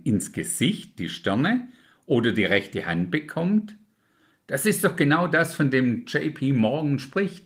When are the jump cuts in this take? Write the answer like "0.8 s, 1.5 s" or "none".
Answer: none